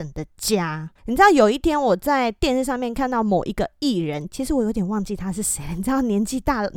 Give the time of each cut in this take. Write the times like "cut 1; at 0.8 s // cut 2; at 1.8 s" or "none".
cut 1; at 1.0 s